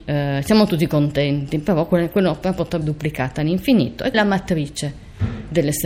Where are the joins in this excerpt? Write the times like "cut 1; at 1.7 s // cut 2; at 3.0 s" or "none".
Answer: cut 1; at 2.8 s // cut 2; at 4.1 s